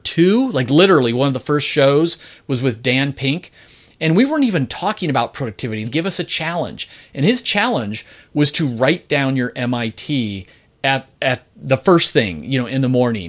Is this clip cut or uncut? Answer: cut